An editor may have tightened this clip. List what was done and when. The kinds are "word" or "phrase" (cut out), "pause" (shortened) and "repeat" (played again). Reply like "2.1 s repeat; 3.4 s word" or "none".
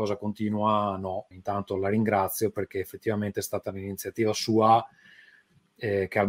1.3 s word

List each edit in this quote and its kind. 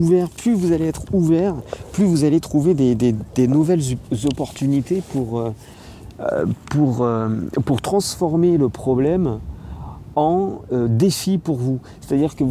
none

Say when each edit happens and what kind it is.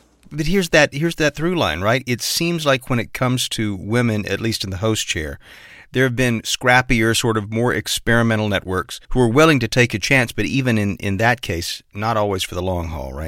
9.0 s pause

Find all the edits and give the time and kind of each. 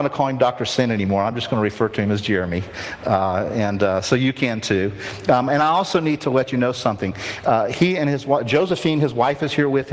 none

